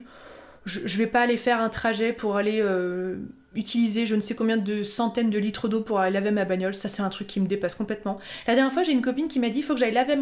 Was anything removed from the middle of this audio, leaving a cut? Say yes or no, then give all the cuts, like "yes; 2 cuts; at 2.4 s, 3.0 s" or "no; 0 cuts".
no; 0 cuts